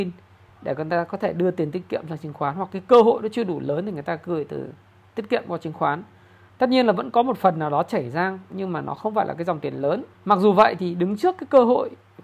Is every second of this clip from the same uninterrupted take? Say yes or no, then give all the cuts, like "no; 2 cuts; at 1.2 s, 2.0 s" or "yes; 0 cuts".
no; 1 cut; at 10.1 s